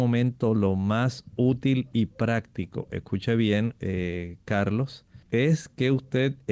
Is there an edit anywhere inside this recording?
yes; 1 cut; at 5.2 s

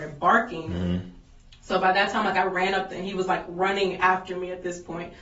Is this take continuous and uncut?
no; 1 cut; at 2.9 s

